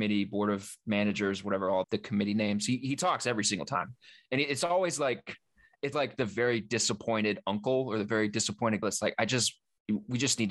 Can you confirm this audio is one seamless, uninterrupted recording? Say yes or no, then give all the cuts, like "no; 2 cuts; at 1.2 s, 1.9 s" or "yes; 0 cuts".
no; 3 cuts; at 1.8 s, 5.9 s, 8.8 s